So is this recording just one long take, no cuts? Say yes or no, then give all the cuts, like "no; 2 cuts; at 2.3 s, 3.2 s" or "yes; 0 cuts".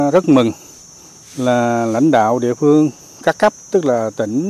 yes; 0 cuts